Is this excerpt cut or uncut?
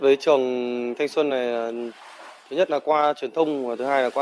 uncut